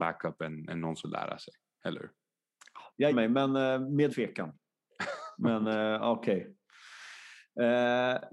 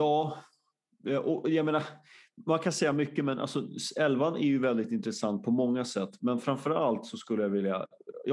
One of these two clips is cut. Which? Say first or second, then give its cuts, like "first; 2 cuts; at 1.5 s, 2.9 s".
first; 3 cuts; at 1.0 s, 3.1 s, 4.1 s